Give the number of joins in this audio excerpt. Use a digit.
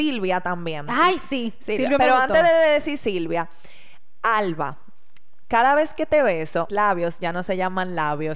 1